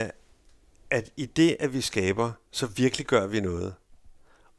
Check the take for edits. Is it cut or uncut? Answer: cut